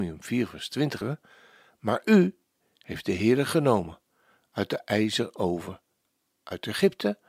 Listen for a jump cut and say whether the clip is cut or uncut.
cut